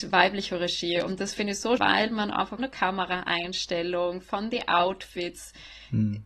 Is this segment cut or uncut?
cut